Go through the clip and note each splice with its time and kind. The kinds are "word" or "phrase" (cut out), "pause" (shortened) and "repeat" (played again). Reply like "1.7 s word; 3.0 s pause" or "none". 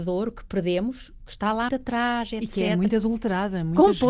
1.7 s word